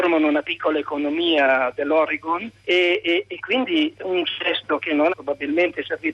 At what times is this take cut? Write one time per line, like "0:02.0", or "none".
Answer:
0:02.6
0:03.9
0:05.1